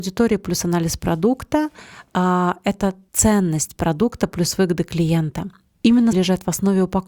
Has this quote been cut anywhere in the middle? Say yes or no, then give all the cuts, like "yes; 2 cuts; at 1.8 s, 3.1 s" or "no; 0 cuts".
yes; 1 cut; at 6.1 s